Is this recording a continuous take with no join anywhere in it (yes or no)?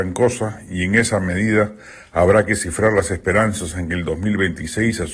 yes